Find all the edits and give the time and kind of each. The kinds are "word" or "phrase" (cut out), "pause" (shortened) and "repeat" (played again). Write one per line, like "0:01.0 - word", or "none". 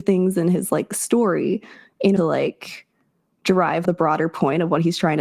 0:02.2 - phrase
0:03.8 - word